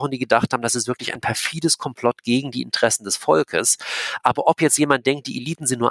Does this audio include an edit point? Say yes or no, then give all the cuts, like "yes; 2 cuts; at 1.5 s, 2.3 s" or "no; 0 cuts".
no; 0 cuts